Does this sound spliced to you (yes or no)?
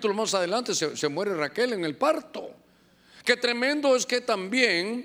no